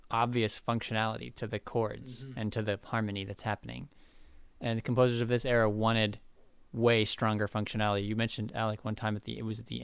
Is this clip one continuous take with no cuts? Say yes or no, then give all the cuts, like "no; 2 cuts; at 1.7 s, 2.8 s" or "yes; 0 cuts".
yes; 0 cuts